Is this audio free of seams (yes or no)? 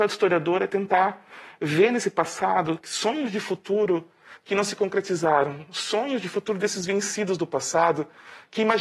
yes